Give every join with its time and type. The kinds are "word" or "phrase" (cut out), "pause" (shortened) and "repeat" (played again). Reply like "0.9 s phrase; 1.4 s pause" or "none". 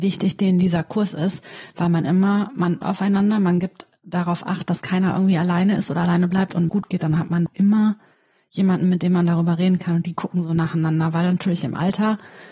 2.8 s word; 6.7 s phrase; 7.5 s word